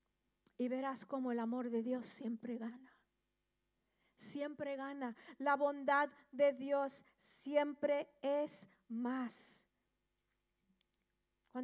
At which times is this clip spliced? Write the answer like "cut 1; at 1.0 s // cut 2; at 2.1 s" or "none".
none